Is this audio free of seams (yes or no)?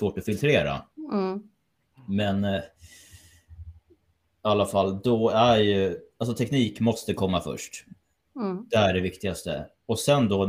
no